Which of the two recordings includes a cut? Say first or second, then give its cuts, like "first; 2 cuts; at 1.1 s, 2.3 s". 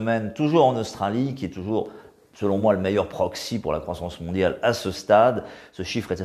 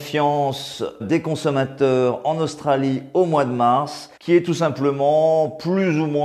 second; 2 cuts; at 1.0 s, 4.2 s